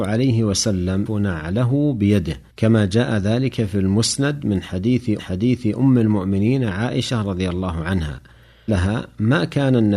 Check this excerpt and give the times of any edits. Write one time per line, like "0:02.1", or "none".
0:01.1
0:02.5
0:05.2
0:08.7